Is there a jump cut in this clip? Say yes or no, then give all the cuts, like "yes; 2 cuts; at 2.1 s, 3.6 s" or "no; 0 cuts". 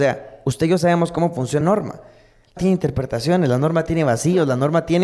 yes; 2 cuts; at 1.6 s, 2.6 s